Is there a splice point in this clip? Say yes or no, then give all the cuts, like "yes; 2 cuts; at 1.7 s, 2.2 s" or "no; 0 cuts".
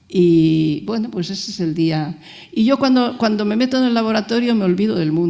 no; 0 cuts